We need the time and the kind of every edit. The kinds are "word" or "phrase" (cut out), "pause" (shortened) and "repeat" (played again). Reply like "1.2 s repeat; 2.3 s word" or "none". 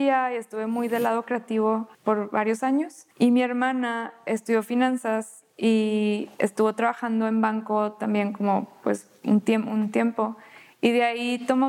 1.9 s pause; 3.1 s pause